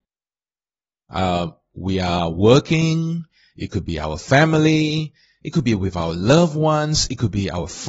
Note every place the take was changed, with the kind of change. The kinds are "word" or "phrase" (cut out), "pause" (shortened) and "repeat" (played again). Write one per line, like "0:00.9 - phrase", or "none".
none